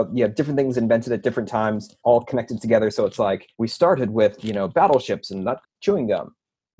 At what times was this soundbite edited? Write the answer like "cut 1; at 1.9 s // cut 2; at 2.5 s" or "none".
cut 1; at 2.0 s // cut 2; at 3.5 s // cut 3; at 5.6 s